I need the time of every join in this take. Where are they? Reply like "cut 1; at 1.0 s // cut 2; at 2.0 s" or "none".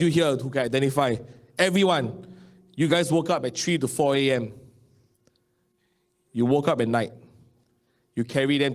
none